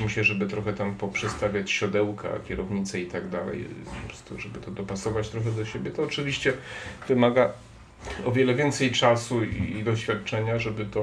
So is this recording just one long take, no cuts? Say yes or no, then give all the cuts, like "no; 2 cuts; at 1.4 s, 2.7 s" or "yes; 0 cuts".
yes; 0 cuts